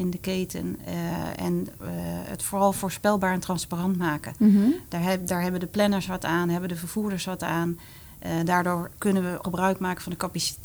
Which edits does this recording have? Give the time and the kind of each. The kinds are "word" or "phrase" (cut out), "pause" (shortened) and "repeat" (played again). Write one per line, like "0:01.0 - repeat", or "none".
0:09.4 - word